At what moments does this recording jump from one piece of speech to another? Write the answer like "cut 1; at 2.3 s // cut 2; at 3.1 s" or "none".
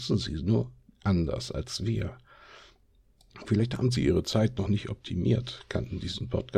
none